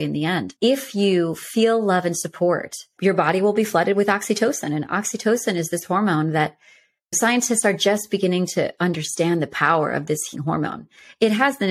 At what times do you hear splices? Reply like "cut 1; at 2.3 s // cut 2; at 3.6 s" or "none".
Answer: cut 1; at 10.3 s